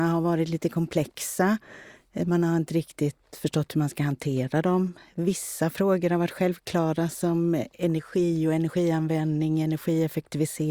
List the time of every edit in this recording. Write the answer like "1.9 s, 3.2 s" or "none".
none